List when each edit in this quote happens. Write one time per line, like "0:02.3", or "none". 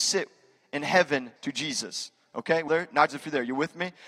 0:01.4
0:02.7
0:03.1